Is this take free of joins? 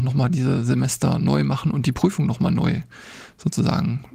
yes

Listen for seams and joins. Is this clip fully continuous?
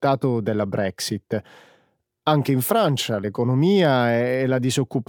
yes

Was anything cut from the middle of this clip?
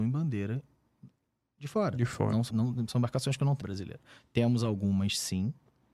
yes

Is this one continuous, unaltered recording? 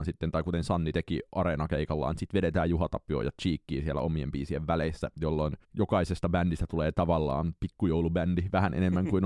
no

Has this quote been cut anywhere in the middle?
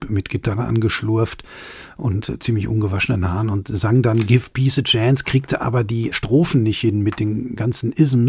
yes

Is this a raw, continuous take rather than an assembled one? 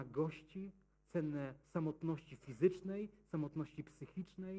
no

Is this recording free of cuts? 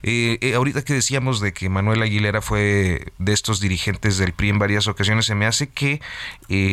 yes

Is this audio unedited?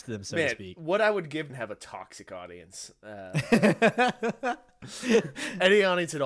no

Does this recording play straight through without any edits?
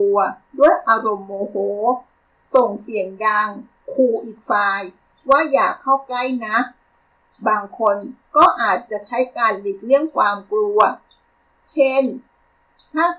yes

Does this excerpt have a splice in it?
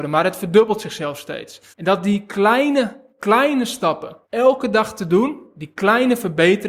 yes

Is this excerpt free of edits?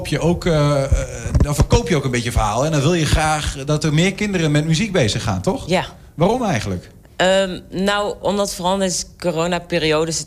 no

